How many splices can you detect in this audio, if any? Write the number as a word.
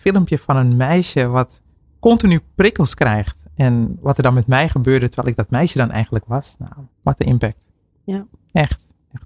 one